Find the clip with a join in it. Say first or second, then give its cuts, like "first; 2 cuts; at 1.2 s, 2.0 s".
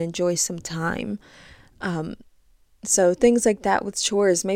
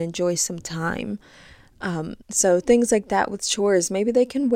second; 1 cut; at 2.2 s